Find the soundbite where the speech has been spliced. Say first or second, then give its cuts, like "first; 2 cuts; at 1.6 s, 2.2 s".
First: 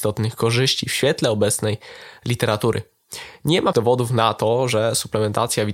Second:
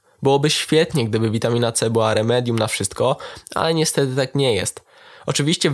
first; 1 cut; at 3.7 s